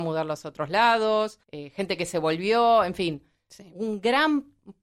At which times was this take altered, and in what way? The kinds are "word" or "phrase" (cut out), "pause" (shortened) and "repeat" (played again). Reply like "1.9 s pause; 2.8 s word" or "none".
1.4 s pause